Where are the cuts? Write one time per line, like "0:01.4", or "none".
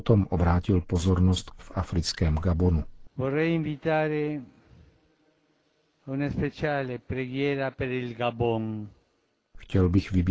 0:01.6